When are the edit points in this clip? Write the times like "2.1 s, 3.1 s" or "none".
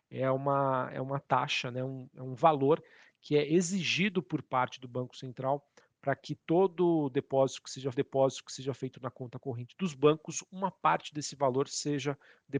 7.9 s